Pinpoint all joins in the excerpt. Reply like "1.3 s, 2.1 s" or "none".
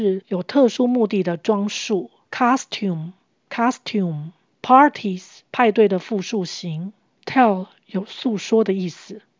5.5 s